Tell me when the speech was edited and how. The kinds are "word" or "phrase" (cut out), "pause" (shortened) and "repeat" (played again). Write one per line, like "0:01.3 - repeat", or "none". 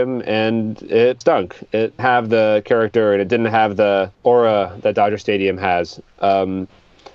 0:01.2 - phrase
0:02.0 - word
0:04.1 - pause